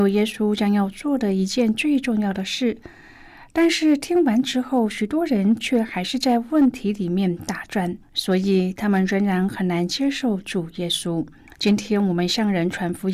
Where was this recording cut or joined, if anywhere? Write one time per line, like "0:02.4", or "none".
0:08.0
0:11.5